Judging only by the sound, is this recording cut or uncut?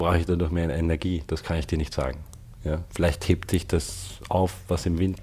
uncut